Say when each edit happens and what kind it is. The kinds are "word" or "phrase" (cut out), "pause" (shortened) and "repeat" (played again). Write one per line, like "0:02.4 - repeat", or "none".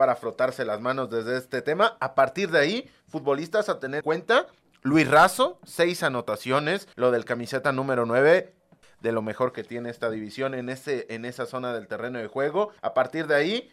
0:04.0 - word
0:06.9 - pause
0:12.8 - pause

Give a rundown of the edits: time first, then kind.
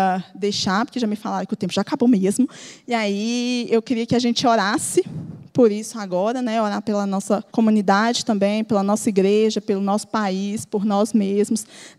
0:07.5 - pause

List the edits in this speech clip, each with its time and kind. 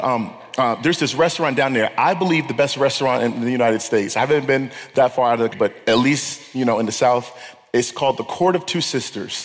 0:05.5 - word

